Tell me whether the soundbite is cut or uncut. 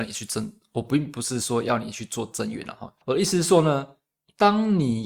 cut